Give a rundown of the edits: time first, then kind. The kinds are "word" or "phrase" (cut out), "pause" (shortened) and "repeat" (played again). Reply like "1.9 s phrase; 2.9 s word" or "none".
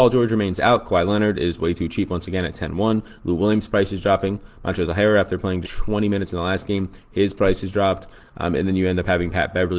5.6 s word